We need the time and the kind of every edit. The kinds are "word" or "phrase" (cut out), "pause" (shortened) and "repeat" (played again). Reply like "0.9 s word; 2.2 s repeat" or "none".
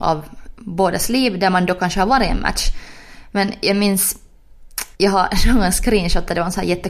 4.9 s pause